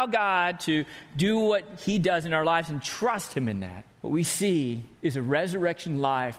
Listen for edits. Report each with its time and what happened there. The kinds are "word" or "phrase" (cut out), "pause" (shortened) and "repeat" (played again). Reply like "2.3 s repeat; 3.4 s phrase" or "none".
3.9 s pause; 5.0 s pause